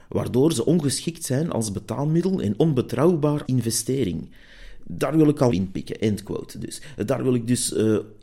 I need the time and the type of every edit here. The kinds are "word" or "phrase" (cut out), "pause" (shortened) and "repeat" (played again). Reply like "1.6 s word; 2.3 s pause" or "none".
2.6 s word; 3.4 s word; 5.5 s phrase